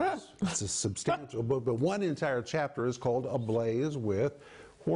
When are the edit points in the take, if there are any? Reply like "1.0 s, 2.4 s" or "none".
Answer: none